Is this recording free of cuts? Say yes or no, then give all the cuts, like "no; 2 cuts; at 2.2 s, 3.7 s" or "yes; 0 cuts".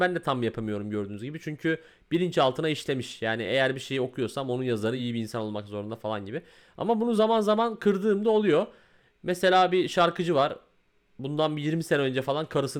yes; 0 cuts